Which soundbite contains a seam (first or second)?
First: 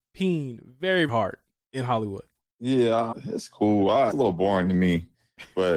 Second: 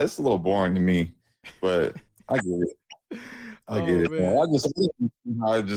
first